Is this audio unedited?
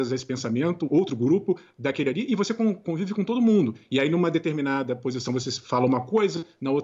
yes; 0 cuts

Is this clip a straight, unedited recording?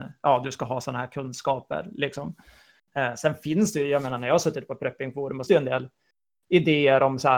no; 1 cut; at 5.5 s

